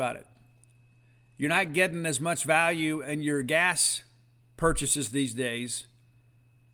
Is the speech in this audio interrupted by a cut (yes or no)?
no